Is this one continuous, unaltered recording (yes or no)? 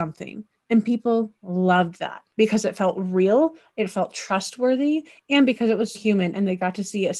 no